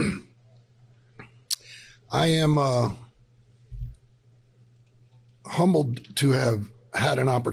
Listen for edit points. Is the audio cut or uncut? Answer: uncut